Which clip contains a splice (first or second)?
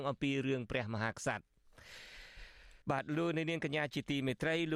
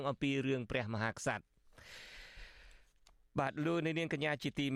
first